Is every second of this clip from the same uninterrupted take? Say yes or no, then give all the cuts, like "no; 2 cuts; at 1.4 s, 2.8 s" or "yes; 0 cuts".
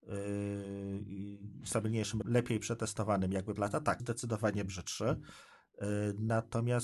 no; 3 cuts; at 2.2 s, 3.6 s, 4.0 s